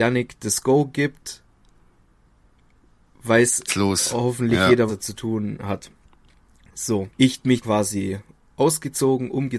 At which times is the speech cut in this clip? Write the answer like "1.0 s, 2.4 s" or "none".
3.7 s, 4.9 s, 7.1 s, 7.6 s

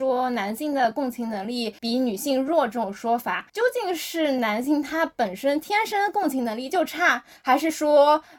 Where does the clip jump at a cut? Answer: 1.8 s, 3.5 s

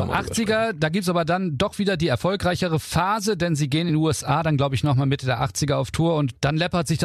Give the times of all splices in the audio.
none

